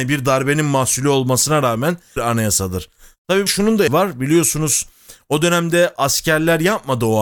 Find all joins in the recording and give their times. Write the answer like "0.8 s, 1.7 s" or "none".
2.2 s, 3.5 s, 3.9 s